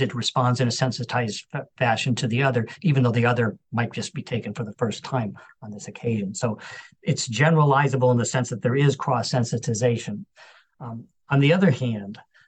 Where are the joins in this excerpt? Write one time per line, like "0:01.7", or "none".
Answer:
none

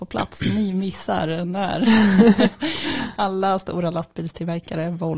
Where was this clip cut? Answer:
none

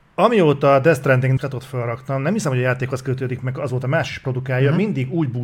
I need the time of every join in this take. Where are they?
0:01.4

